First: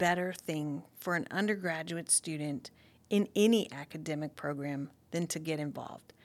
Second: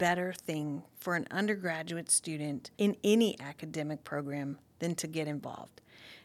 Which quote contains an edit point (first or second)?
second